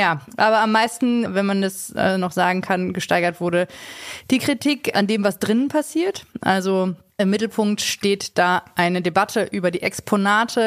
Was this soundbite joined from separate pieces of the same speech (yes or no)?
no